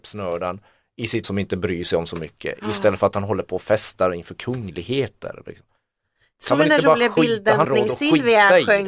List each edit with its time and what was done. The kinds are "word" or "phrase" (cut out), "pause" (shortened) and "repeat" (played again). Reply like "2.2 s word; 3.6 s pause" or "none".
1.2 s word; 7.6 s word